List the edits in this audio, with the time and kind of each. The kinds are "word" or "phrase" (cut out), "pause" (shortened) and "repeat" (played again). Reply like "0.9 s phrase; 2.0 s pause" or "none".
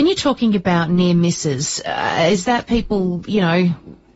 none